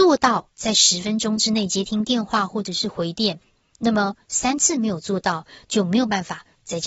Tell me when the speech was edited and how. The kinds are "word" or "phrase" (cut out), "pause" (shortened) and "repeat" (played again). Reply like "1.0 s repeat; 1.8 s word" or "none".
none